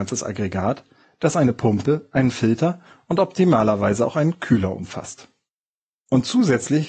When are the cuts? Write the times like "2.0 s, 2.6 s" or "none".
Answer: none